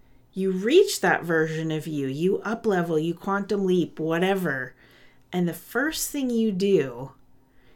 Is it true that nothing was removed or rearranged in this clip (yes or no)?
yes